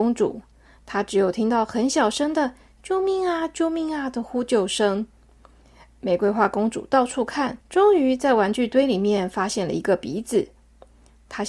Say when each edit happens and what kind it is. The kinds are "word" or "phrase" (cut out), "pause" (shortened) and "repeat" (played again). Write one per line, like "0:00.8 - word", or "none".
0:07.6 - pause